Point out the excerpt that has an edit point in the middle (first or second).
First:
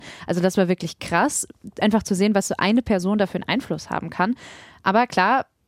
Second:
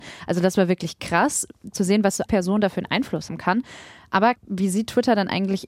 second